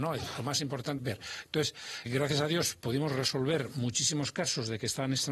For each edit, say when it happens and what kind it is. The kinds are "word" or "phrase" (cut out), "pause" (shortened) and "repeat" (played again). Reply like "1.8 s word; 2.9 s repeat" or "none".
1.0 s word; 2.1 s word